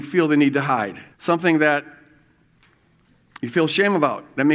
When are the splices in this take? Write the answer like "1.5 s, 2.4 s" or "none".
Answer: 1.1 s